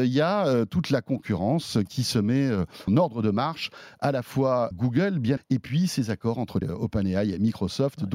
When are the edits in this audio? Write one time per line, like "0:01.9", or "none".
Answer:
0:02.9
0:04.7
0:05.4
0:06.6